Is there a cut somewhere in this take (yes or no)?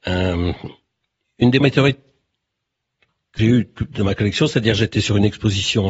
yes